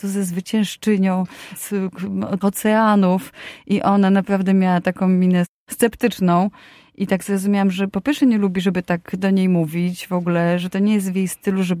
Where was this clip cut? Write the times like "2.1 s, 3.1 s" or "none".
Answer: 1.6 s, 2.4 s